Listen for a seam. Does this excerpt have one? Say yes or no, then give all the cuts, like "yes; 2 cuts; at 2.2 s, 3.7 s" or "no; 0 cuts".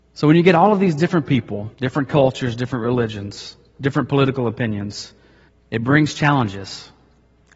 yes; 2 cuts; at 1.7 s, 5.5 s